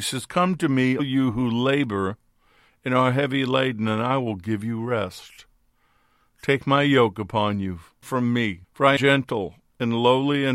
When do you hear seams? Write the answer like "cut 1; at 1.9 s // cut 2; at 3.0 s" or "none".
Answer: cut 1; at 1.0 s // cut 2; at 8.0 s // cut 3; at 8.6 s // cut 4; at 9.0 s